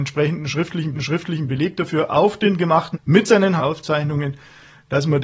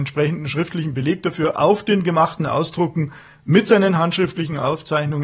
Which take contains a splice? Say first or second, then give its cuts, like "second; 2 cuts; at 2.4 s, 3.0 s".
first; 3 cuts; at 0.9 s, 2.9 s, 3.6 s